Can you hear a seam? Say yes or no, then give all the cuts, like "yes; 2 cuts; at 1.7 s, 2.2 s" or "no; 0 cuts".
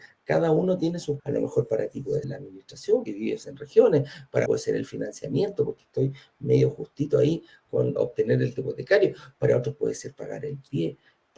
yes; 6 cuts; at 1.2 s, 2.2 s, 3.1 s, 4.5 s, 8.0 s, 8.6 s